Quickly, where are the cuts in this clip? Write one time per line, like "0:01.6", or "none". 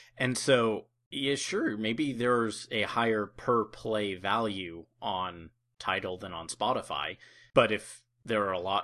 none